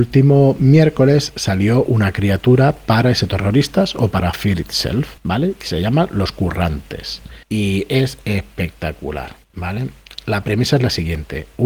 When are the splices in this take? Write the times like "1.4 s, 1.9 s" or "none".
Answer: 5.2 s, 7.4 s, 9.4 s